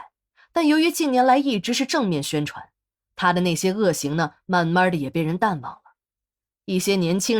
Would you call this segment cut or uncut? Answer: uncut